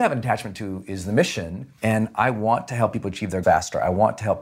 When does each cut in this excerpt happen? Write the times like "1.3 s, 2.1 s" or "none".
1.8 s, 3.4 s